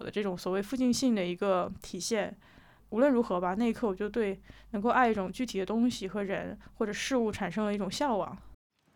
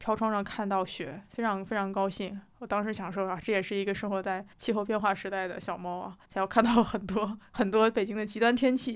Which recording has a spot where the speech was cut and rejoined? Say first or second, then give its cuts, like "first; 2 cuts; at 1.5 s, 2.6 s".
second; 2 cuts; at 4.5 s, 6.2 s